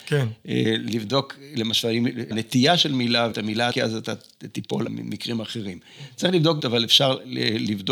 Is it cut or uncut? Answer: cut